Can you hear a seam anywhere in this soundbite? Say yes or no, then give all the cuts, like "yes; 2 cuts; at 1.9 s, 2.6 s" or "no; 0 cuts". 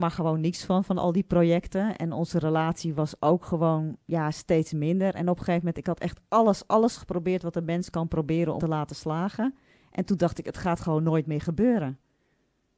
yes; 2 cuts; at 6.7 s, 8.6 s